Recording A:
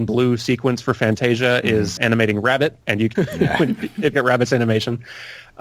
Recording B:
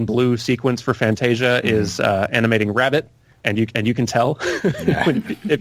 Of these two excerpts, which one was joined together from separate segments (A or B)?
A